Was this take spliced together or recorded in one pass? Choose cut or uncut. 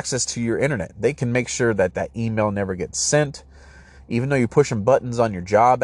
uncut